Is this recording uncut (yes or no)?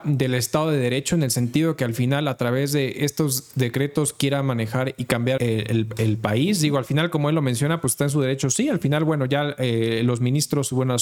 no